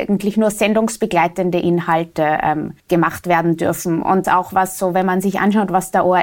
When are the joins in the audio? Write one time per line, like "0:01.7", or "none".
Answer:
0:02.8
0:04.2